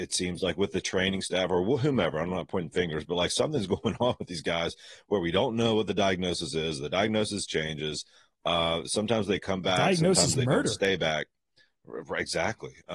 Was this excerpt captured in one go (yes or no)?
yes